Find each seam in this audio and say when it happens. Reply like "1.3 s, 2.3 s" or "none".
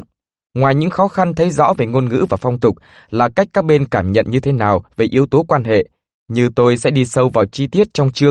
none